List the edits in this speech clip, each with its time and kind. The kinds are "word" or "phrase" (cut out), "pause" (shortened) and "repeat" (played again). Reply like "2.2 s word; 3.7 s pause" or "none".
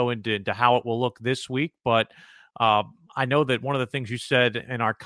none